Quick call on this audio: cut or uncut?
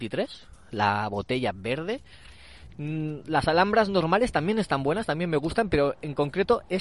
uncut